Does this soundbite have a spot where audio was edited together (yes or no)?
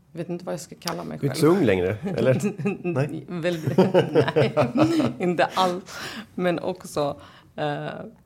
no